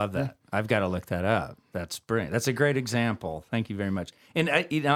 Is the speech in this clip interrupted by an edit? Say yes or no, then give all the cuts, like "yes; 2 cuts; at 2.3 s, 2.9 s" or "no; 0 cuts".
no; 0 cuts